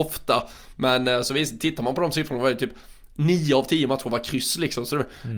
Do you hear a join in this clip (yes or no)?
no